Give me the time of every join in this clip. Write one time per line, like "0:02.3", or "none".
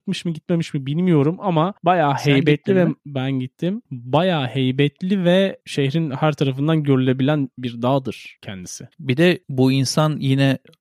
0:08.9